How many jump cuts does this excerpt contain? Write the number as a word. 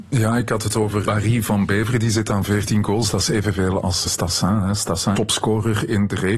three